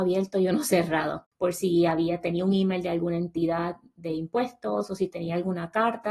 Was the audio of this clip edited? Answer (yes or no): no